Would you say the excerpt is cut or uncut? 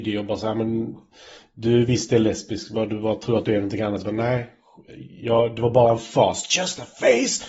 uncut